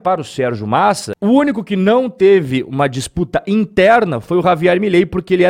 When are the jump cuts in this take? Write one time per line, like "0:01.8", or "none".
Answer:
none